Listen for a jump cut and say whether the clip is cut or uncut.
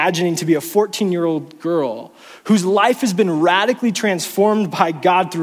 uncut